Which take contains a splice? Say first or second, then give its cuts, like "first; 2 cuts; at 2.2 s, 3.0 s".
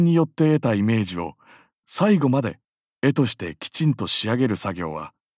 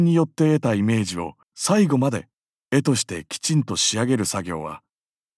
second; 1 cut; at 1.4 s